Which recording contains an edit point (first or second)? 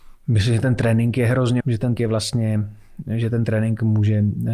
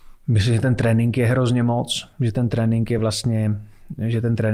first